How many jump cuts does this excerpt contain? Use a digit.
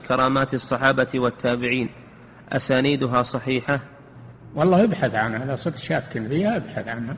0